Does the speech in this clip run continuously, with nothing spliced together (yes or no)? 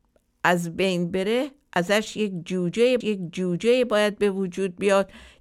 no